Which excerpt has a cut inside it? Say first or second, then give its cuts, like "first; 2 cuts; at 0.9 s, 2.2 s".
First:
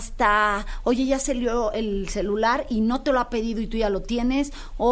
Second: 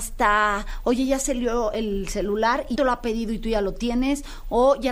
second; 1 cut; at 2.7 s